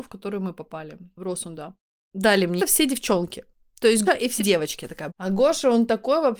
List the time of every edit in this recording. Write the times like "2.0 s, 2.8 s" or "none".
2.6 s, 4.1 s, 4.4 s, 5.1 s